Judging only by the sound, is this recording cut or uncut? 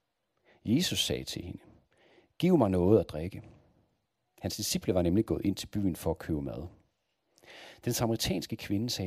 uncut